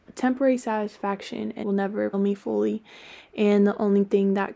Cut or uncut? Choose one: cut